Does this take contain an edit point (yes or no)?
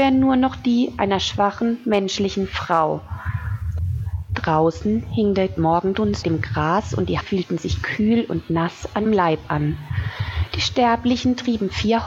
yes